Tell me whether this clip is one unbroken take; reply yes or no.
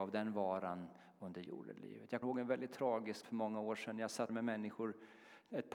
no